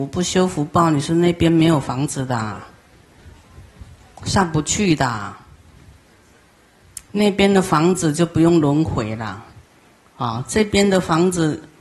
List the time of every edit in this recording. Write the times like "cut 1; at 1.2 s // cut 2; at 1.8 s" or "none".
none

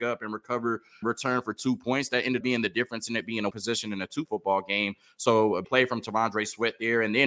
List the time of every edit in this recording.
cut 1; at 1.0 s // cut 2; at 2.4 s // cut 3; at 3.5 s // cut 4; at 4.3 s // cut 5; at 5.6 s

